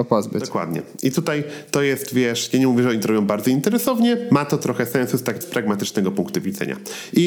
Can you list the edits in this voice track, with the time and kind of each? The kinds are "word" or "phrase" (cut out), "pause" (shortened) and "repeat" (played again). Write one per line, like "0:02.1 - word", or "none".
0:05.4 - word